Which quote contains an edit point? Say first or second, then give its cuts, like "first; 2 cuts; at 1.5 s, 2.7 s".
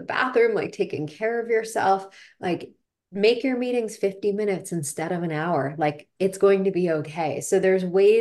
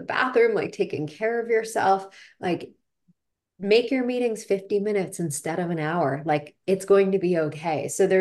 first; 1 cut; at 2.9 s